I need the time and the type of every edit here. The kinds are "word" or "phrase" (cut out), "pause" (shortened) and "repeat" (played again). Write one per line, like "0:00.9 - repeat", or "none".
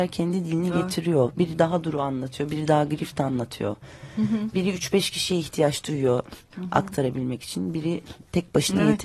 0:06.5 - word